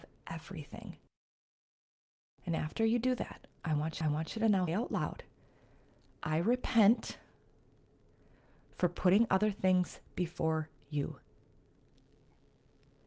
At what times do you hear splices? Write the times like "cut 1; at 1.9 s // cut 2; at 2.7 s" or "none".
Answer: cut 1; at 4.0 s // cut 2; at 4.7 s